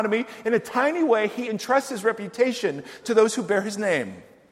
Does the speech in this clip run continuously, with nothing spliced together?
yes; 0 cuts

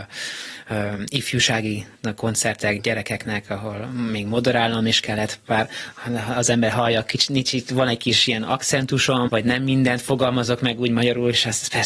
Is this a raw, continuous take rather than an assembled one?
no; 2 cuts; at 1.9 s, 9.3 s

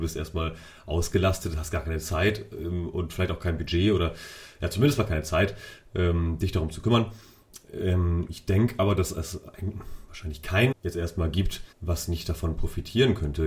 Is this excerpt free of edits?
no; 2 cuts; at 10.7 s, 11.7 s

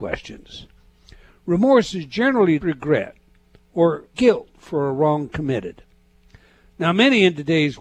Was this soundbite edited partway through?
yes; 2 cuts; at 2.6 s, 4.1 s

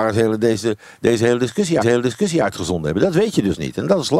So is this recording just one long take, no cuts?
no; 1 cut; at 1.8 s

